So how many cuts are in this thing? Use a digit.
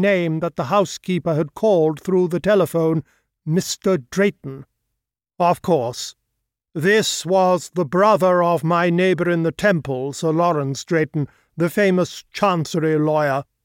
0